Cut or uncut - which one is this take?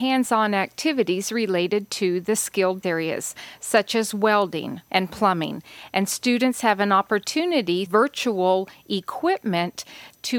cut